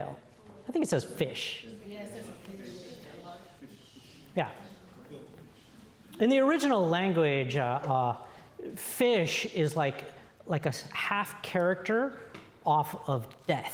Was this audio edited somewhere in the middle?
no; 0 cuts

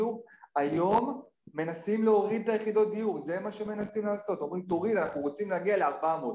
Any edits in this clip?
no; 0 cuts

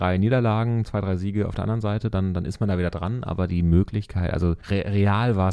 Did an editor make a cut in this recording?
yes; 1 cut; at 4.6 s

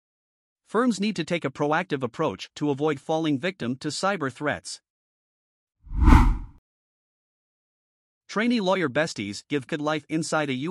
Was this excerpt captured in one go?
no; 1 cut; at 9.7 s

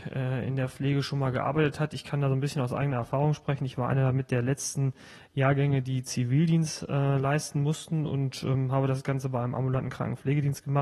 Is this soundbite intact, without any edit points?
yes; 0 cuts

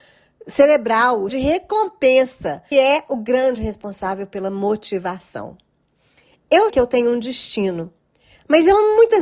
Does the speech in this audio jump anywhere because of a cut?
yes; 3 cuts; at 1.3 s, 2.7 s, 6.7 s

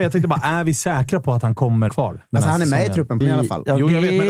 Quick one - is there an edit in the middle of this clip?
yes; 2 cuts; at 1.9 s, 3.2 s

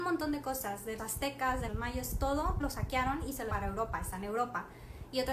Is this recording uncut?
no; 4 cuts; at 1.0 s, 1.7 s, 2.6 s, 3.5 s

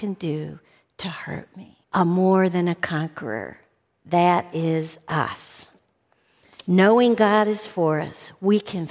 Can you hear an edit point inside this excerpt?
yes; 1 cut; at 1.8 s

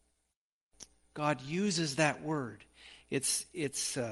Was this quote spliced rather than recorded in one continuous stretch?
no; 0 cuts

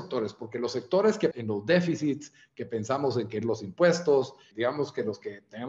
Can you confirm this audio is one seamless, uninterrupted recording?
no; 3 cuts; at 1.3 s, 3.4 s, 4.5 s

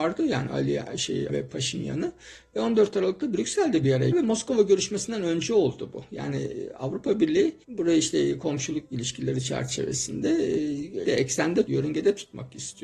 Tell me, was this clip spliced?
yes; 5 cuts; at 1.3 s, 4.1 s, 7.6 s, 11.0 s, 11.7 s

